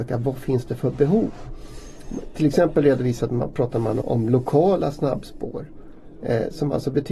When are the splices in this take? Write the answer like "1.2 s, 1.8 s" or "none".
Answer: 4.0 s